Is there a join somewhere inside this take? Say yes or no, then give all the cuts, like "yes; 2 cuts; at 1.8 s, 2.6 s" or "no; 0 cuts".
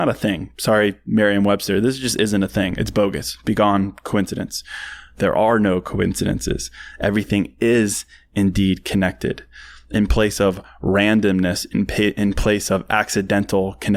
no; 0 cuts